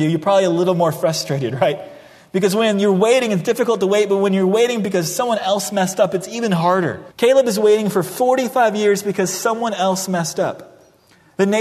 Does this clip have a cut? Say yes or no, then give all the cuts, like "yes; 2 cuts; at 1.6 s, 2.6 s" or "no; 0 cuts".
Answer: yes; 1 cut; at 7.1 s